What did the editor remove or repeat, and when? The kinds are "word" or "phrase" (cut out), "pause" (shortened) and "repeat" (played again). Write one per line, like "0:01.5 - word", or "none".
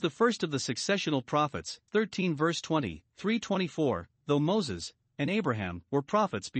0:01.9 - word
0:03.1 - pause
0:05.3 - word